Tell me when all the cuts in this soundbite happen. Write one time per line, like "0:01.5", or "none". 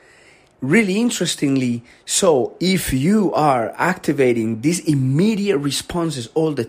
none